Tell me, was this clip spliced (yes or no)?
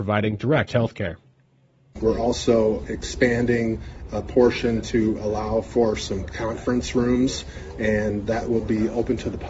no